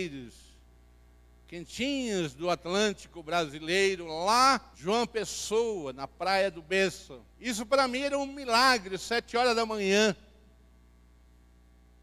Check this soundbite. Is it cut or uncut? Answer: cut